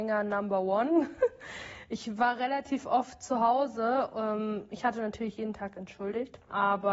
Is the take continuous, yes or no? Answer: yes